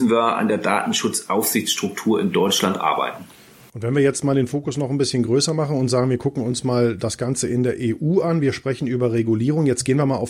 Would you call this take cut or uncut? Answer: uncut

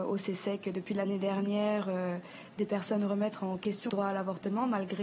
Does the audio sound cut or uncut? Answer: cut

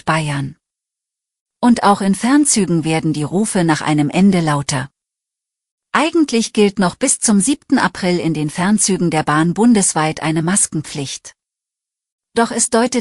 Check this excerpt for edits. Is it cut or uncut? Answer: uncut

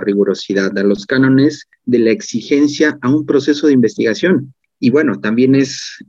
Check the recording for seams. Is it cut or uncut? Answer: uncut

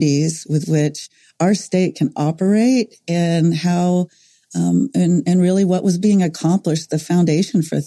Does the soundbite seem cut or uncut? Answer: uncut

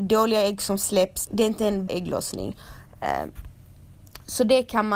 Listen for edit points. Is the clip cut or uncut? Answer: cut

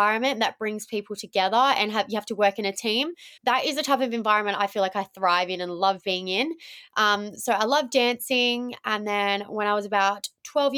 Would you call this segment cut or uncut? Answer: cut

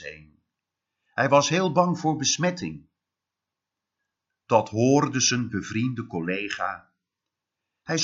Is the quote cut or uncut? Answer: uncut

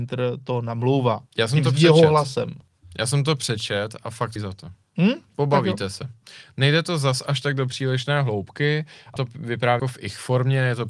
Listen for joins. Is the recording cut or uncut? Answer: cut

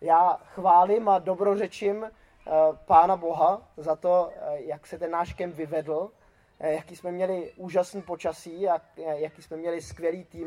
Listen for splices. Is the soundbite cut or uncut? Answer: uncut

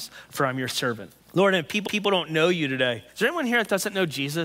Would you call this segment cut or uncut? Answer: cut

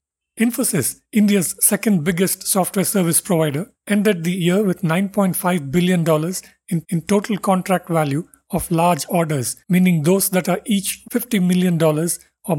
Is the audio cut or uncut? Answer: cut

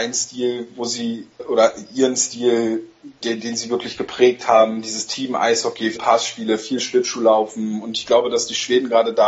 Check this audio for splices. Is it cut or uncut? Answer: cut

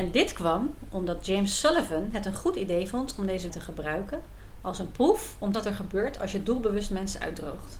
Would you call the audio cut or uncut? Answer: cut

